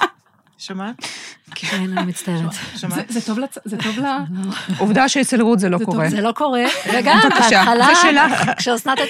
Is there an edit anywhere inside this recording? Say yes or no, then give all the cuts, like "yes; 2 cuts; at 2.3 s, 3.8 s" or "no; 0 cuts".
no; 0 cuts